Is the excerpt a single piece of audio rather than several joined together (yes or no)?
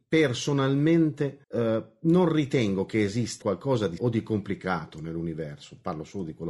no